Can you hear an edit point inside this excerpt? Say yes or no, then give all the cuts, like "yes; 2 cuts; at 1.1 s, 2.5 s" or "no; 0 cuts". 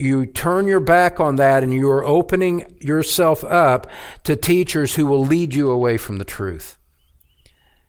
no; 0 cuts